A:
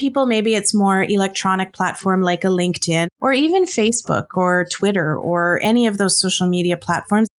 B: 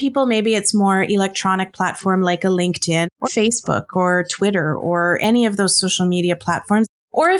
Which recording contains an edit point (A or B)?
B